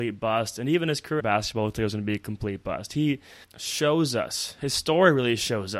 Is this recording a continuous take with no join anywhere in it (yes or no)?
no